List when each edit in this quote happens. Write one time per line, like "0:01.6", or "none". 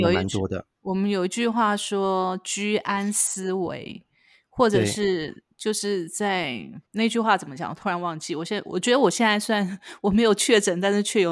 0:06.9